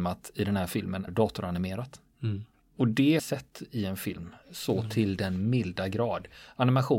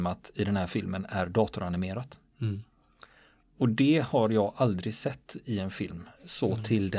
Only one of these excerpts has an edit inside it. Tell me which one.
first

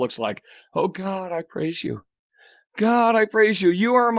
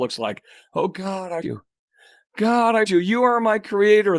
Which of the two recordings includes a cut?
second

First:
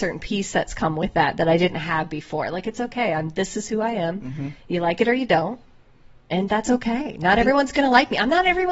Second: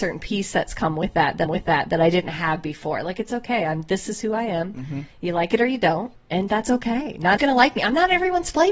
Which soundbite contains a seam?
second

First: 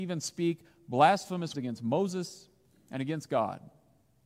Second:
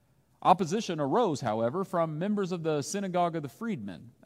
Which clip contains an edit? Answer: first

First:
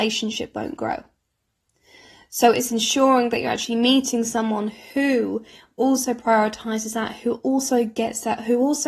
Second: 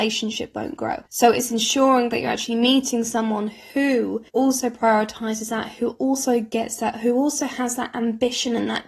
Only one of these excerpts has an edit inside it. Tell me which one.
second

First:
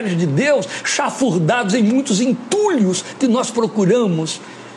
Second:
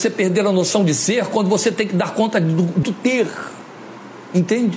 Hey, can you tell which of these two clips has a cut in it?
second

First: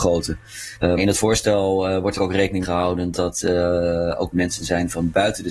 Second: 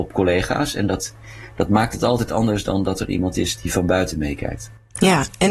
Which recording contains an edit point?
first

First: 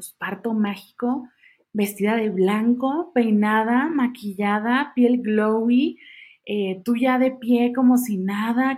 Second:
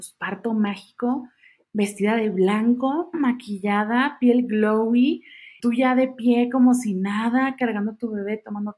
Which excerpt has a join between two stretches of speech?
second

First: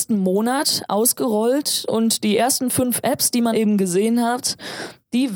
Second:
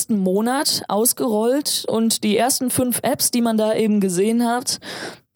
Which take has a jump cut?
first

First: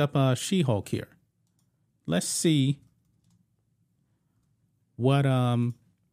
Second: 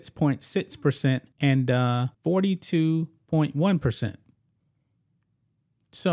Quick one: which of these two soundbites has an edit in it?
second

